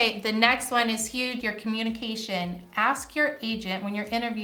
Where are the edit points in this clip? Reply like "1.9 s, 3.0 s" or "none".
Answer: 1.4 s